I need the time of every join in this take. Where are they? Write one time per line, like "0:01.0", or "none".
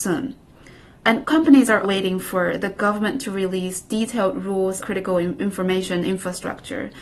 0:01.8
0:04.8